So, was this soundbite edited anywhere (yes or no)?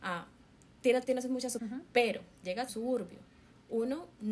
yes